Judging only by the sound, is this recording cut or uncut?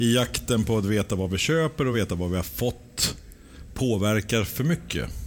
uncut